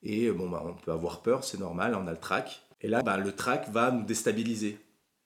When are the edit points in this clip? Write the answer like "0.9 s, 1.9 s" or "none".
3.0 s